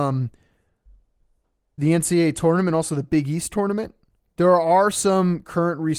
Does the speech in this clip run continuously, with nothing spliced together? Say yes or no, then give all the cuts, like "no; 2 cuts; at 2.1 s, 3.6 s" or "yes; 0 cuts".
no; 1 cut; at 4.2 s